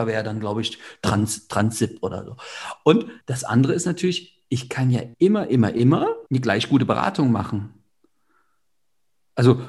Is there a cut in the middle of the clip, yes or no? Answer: yes